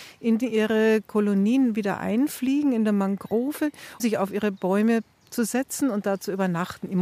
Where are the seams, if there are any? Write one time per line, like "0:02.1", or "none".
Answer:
0:04.0